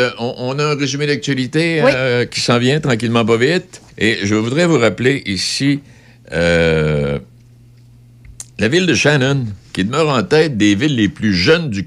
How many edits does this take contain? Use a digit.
2